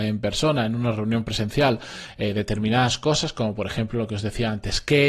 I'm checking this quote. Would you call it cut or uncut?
uncut